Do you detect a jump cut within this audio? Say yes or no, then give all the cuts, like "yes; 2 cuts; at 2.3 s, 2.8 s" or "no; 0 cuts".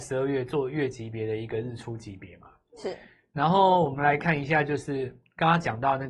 no; 0 cuts